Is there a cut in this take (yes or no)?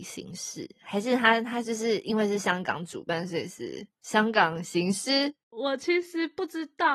yes